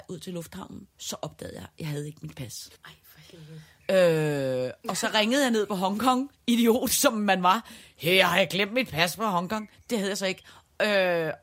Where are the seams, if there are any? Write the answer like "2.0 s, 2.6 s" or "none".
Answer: 0.9 s, 2.8 s